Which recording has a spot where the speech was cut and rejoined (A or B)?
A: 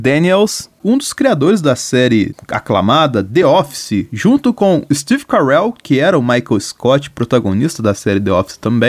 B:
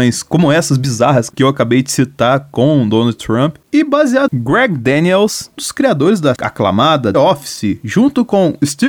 B